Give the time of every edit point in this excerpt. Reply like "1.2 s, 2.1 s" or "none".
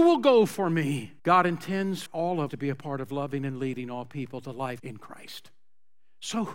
1.2 s, 2.1 s, 2.5 s, 4.8 s